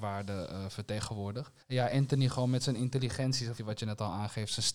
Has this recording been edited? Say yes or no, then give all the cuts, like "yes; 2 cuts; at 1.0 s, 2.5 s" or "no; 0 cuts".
yes; 2 cuts; at 1.6 s, 3.6 s